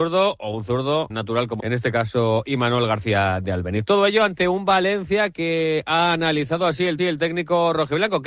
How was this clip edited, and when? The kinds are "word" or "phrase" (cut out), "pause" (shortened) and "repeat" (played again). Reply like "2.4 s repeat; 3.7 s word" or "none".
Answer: 1.1 s word; 1.6 s word; 7.0 s repeat